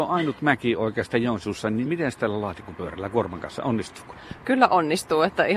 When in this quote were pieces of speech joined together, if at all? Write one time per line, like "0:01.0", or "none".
none